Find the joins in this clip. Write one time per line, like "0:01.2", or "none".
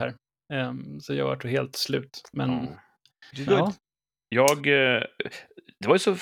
0:03.5